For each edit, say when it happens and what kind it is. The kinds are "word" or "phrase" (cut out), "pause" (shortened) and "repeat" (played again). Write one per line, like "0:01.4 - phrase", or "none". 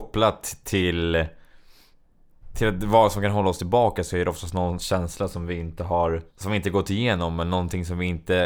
0:06.3 - pause